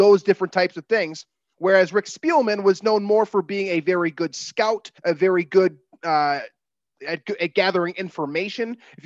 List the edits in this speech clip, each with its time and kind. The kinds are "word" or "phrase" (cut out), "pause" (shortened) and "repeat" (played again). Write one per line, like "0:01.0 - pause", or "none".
0:05.0 - pause